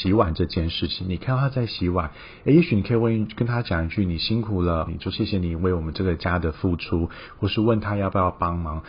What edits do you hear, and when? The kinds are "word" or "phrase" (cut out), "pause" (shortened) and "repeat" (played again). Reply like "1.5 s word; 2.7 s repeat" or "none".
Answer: 4.9 s word

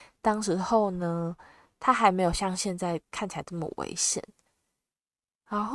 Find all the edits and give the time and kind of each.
none

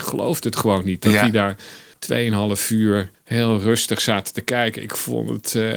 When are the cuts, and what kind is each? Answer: 1.9 s pause; 3.1 s pause

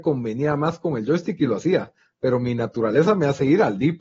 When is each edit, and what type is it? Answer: none

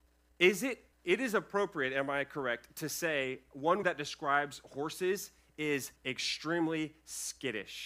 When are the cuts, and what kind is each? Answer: 0.9 s pause; 3.8 s word; 6.0 s pause

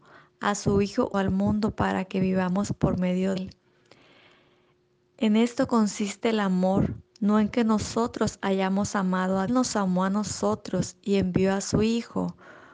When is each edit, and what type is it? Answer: 1.1 s word; 3.4 s word; 7.1 s pause; 9.5 s phrase

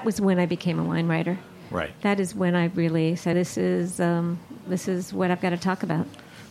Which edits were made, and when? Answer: 3.3 s word

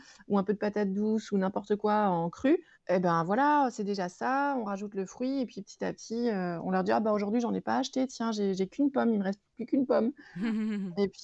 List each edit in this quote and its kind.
2.7 s pause

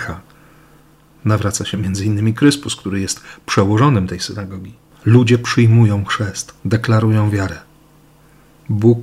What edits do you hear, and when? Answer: 4.9 s pause; 6.6 s pause

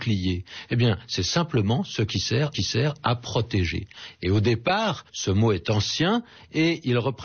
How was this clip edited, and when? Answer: 2.5 s repeat; 5.1 s pause

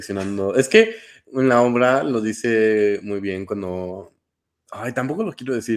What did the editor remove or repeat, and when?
none

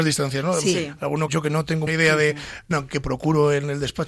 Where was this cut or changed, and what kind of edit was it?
1.3 s word; 1.9 s word; 2.7 s word

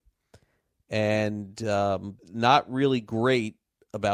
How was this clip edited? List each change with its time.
2.2 s pause

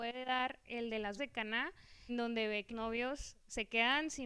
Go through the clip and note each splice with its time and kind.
1.2 s word; 2.1 s word; 2.7 s word

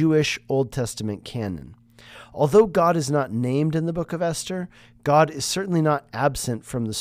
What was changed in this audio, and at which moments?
none

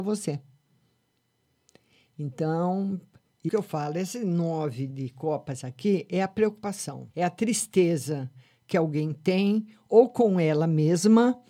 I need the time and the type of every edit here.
3.5 s phrase; 4.9 s word; 7.1 s pause

